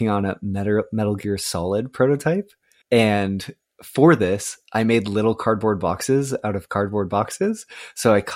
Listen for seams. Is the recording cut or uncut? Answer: uncut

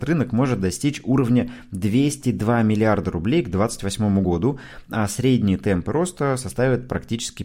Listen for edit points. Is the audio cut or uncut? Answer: uncut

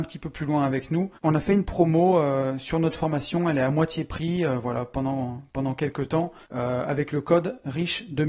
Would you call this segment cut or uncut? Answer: cut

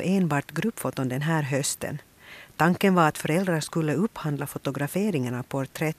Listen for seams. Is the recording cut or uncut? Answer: uncut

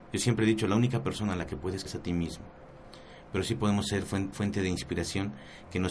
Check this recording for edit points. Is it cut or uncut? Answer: cut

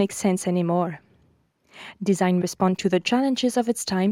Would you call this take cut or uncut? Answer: cut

